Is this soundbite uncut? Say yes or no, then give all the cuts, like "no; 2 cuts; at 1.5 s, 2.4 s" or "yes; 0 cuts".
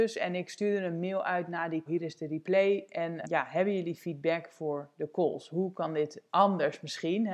no; 2 cuts; at 1.9 s, 3.2 s